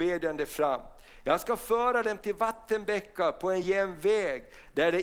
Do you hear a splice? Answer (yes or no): no